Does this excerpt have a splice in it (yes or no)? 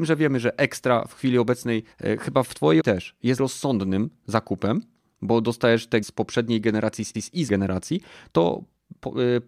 yes